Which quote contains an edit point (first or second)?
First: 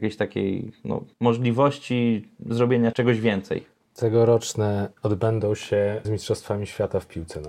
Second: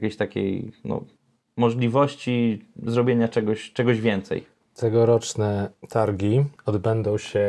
first